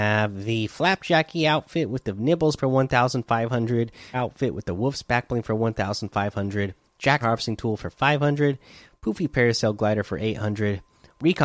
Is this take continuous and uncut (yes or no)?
no